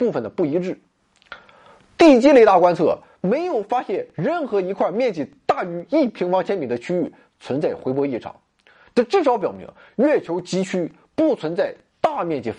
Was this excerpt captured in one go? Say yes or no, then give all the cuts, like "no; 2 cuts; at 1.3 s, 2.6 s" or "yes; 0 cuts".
yes; 0 cuts